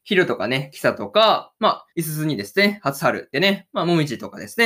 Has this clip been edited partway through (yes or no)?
yes